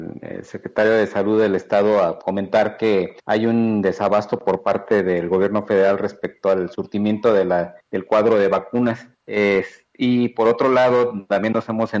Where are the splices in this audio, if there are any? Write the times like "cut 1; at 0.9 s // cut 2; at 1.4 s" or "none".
cut 1; at 3.2 s // cut 2; at 7.8 s // cut 3; at 9.2 s

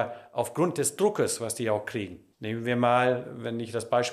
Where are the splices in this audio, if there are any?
cut 1; at 2.3 s

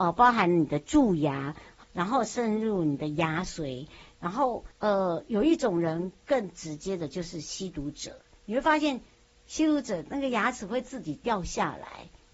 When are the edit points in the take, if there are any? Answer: cut 1; at 1.8 s // cut 2; at 4.7 s

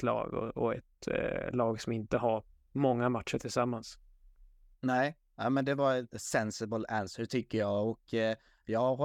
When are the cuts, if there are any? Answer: none

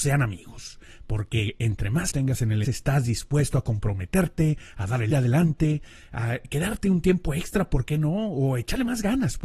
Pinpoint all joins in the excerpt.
cut 1; at 2.1 s // cut 2; at 2.6 s // cut 3; at 5.1 s

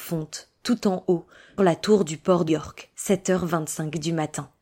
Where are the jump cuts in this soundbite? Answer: cut 1; at 1.6 s // cut 2; at 2.5 s // cut 3; at 2.9 s

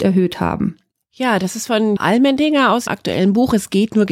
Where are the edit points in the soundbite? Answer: cut 1; at 2.0 s // cut 2; at 2.9 s

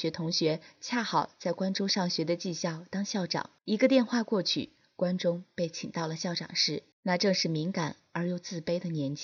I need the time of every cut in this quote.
cut 1; at 3.6 s // cut 2; at 6.9 s

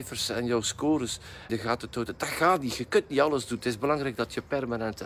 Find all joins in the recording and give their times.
cut 1; at 1.5 s

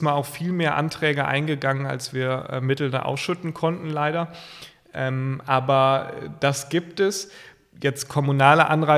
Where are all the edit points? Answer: none

